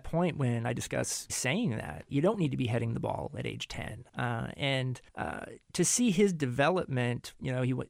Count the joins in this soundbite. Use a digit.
4